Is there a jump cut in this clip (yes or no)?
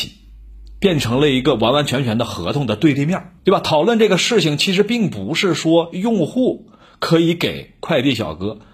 yes